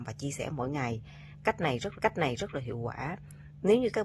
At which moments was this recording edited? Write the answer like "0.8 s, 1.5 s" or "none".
1.9 s